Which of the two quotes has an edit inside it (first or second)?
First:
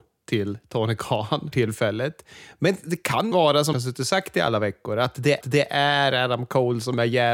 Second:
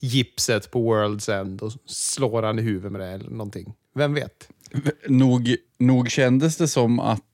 first